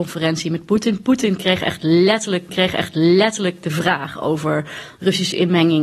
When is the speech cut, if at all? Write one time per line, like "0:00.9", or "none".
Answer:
0:02.5